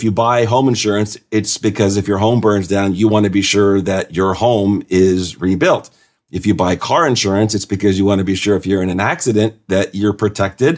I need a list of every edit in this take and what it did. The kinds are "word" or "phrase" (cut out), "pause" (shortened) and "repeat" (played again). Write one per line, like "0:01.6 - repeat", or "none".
none